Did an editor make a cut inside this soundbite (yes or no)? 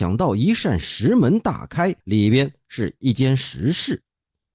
yes